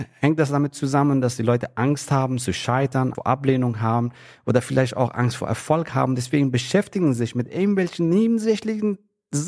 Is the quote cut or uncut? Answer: cut